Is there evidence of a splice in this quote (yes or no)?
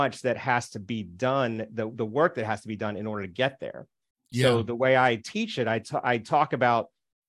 no